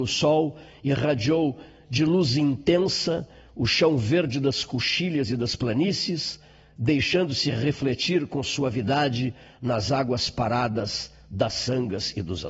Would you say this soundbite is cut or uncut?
uncut